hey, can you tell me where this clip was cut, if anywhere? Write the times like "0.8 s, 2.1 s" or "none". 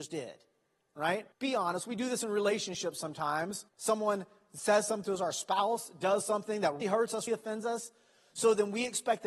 1.3 s, 3.7 s, 6.8 s, 7.3 s